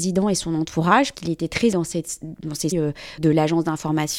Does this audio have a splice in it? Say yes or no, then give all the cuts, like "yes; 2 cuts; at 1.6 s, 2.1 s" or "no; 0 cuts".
yes; 4 cuts; at 1.1 s, 1.7 s, 2.7 s, 3.2 s